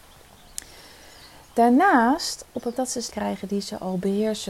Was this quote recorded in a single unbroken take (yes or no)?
no